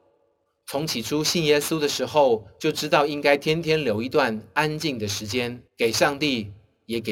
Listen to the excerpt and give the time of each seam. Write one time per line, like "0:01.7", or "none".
0:05.7

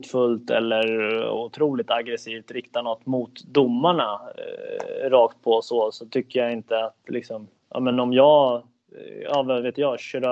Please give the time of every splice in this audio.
none

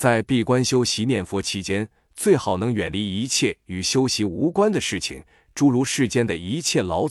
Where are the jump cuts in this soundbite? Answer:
none

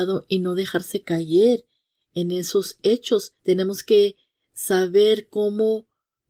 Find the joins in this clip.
0:03.4

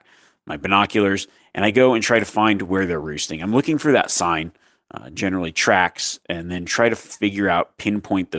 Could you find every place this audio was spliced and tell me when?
none

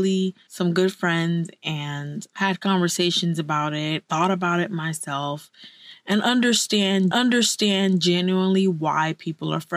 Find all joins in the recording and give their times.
0:04.1
0:07.1

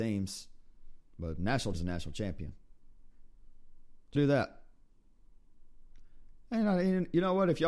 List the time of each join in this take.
0:01.7
0:04.1

